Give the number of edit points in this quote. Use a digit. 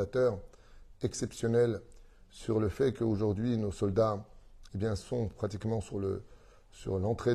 0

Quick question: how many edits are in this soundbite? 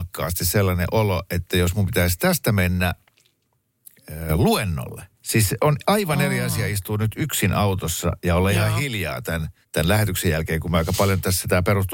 2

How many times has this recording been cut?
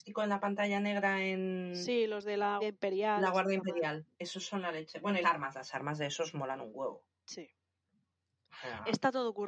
3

